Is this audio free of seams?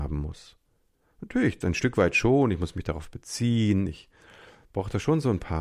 yes; 0 cuts

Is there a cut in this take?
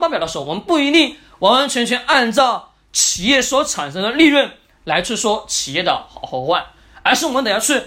no; 0 cuts

